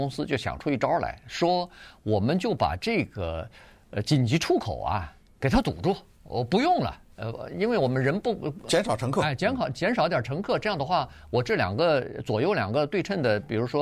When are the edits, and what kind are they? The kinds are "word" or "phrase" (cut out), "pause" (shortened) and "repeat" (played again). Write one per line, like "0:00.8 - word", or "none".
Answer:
none